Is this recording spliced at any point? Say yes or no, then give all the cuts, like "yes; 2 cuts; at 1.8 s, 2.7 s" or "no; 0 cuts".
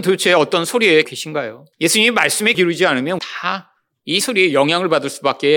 yes; 5 cuts; at 1.0 s, 1.7 s, 2.5 s, 3.2 s, 4.2 s